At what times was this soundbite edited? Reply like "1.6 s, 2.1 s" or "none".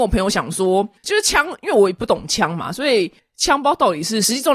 1.0 s